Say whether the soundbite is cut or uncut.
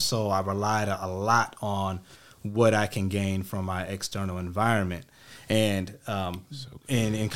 uncut